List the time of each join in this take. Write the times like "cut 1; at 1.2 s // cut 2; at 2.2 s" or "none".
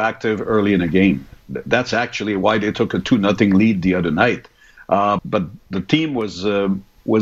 cut 1; at 5.2 s